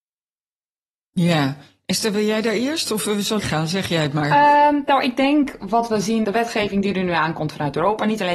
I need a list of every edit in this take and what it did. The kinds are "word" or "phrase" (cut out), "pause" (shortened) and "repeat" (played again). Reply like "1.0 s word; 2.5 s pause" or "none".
3.4 s word; 6.2 s word